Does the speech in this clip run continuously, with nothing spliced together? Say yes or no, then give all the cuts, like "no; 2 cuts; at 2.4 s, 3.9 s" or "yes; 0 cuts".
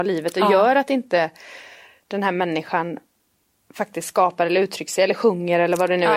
yes; 0 cuts